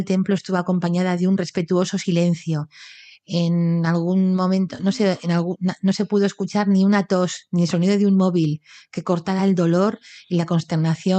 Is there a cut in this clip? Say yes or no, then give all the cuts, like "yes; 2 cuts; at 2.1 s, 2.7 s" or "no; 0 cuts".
no; 0 cuts